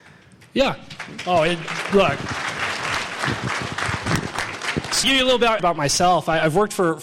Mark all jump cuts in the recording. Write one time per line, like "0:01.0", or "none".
0:05.0
0:05.6

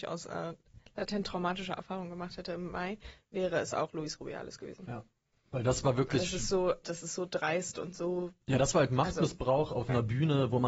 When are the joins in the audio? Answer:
0:06.8

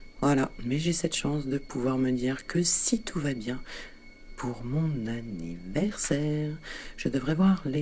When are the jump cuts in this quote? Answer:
none

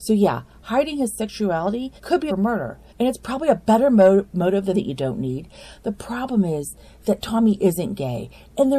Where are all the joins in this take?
0:02.0
0:02.3
0:02.9
0:04.7

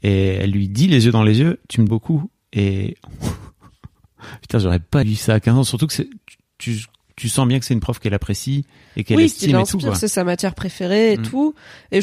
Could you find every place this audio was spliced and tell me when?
0:01.9
0:05.0

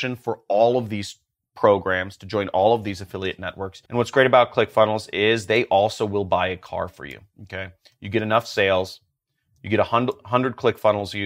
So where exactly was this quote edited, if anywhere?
0:03.9

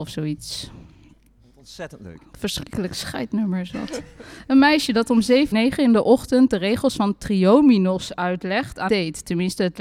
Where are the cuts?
0:05.5
0:08.9

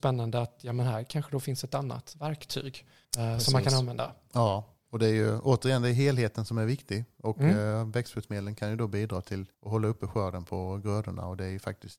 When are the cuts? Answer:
0:03.0
0:09.5

